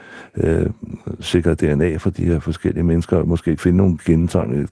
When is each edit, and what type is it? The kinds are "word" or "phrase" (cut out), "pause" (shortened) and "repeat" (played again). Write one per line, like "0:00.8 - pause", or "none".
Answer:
0:03.6 - word